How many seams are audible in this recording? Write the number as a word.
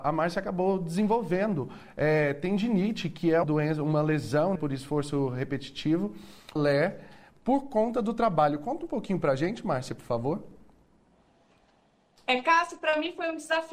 three